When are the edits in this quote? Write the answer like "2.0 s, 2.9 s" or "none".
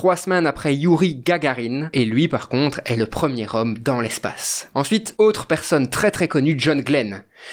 none